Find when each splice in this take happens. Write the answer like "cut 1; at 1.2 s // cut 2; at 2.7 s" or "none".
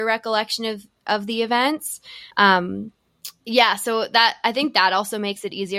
cut 1; at 2.3 s